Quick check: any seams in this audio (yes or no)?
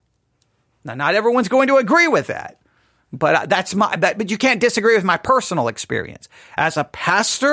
no